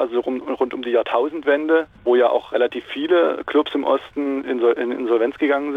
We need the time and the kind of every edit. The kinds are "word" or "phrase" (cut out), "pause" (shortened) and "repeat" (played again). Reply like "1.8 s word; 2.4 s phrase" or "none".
2.0 s pause